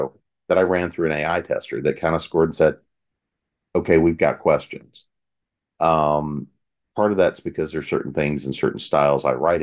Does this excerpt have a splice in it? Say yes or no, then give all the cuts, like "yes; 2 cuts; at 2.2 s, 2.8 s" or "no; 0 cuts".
no; 0 cuts